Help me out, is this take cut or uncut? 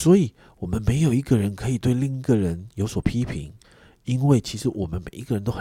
uncut